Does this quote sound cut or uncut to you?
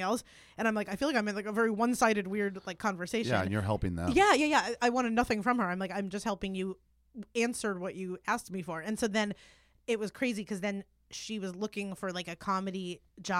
uncut